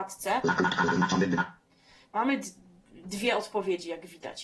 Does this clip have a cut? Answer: no; 0 cuts

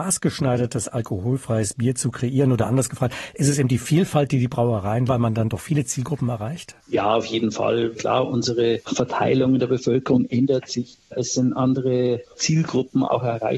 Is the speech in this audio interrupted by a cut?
yes; 1 cut; at 5.1 s

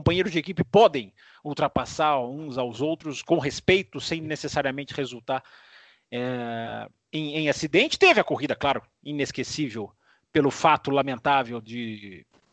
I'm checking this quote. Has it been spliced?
no; 0 cuts

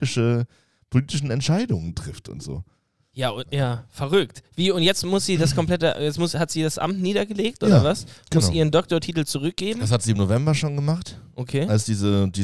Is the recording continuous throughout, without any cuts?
yes; 0 cuts

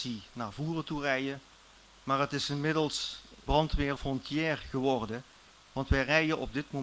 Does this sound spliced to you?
yes; 2 cuts; at 3.5 s, 4.0 s

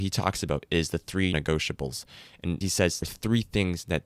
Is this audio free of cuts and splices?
no; 3 cuts; at 1.3 s, 2.6 s, 3.0 s

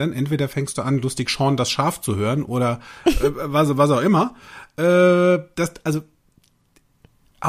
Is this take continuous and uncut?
yes; 0 cuts

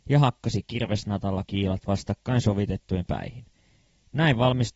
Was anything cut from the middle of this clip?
yes; 2 cuts; at 1.5 s, 3.1 s

